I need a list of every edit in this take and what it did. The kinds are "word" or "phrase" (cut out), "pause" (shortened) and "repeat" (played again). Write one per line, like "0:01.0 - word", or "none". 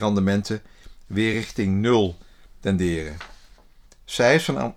none